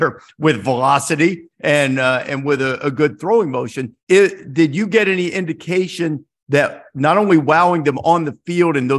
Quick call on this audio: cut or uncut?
cut